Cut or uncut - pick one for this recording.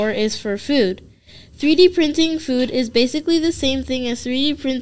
uncut